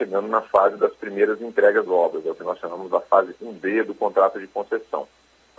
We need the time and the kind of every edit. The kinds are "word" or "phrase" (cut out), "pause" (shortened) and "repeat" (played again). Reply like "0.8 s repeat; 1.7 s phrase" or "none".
1.9 s word

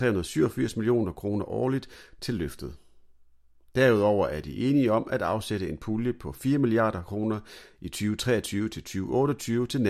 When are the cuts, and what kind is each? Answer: none

